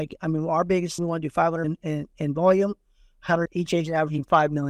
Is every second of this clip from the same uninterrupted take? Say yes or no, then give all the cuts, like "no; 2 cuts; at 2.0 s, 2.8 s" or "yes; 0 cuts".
no; 3 cuts; at 1.0 s, 1.6 s, 3.5 s